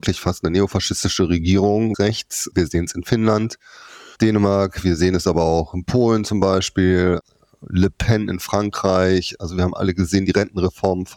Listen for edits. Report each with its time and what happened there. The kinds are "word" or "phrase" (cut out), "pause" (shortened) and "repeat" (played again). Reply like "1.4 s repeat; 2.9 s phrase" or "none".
1.9 s phrase